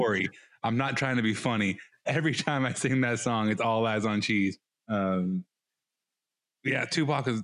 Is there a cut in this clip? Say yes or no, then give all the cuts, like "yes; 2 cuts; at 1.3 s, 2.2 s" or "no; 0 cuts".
yes; 1 cut; at 4.7 s